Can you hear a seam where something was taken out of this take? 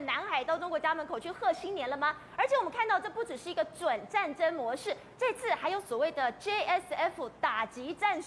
no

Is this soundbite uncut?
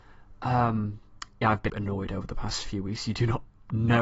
no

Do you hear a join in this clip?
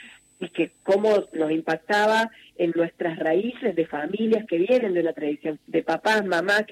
yes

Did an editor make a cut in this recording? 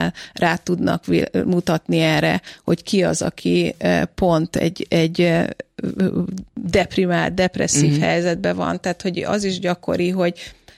yes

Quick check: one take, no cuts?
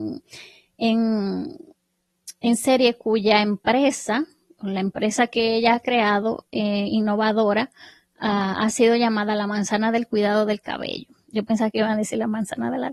yes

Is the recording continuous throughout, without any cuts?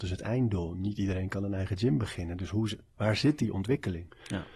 yes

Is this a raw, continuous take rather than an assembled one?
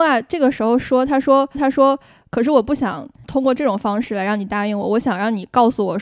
no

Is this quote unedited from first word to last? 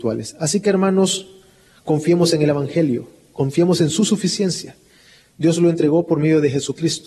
yes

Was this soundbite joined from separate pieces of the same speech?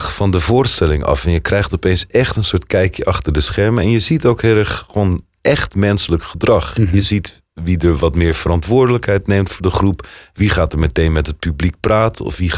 no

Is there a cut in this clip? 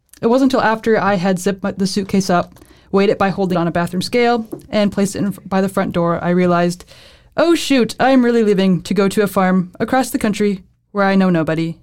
yes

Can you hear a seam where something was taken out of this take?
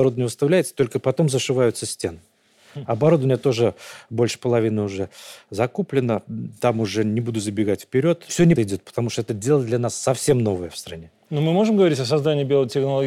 yes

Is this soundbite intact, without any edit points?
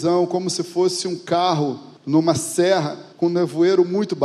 no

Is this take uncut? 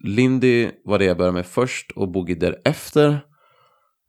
yes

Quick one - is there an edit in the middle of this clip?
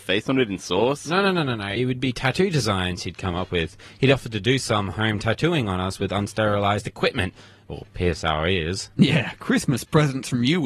no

